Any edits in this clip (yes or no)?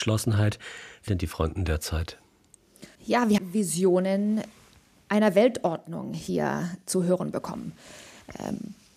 yes